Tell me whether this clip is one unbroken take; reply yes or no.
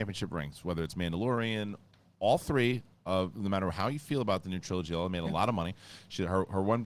yes